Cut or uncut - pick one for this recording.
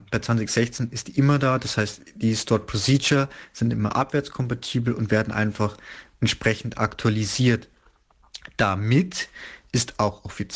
uncut